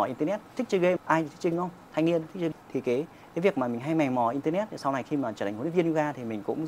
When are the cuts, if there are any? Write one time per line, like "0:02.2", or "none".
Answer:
0:01.0
0:01.5
0:02.5